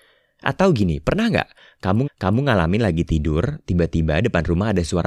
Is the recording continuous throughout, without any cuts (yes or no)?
no